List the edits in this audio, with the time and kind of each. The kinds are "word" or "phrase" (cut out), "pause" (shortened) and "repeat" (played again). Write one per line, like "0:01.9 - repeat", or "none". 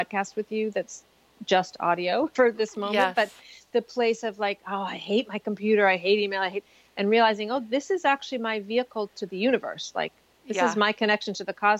none